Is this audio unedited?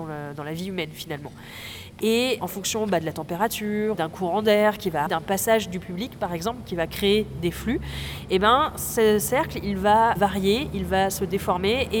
no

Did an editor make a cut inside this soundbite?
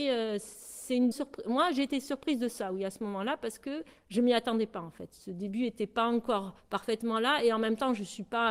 yes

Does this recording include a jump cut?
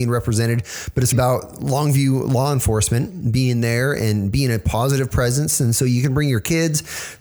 yes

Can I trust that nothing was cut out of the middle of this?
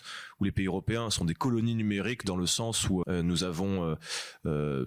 no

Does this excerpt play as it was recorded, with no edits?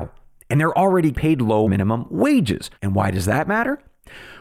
no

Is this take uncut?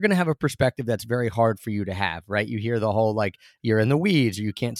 yes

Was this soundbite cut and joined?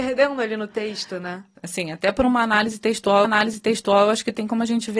yes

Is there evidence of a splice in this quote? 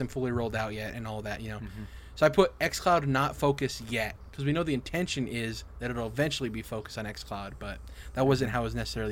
no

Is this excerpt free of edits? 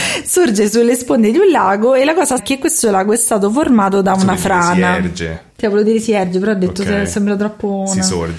no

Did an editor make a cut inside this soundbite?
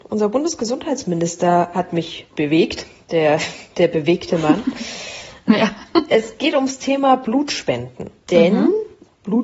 yes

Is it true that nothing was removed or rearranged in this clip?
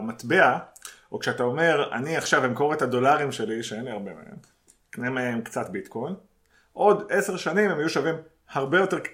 yes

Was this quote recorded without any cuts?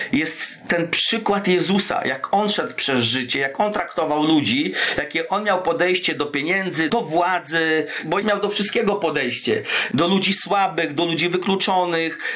no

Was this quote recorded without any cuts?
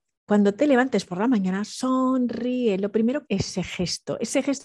no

